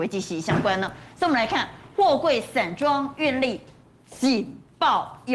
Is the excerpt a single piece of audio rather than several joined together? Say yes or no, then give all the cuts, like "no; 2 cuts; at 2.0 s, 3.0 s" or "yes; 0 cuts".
yes; 0 cuts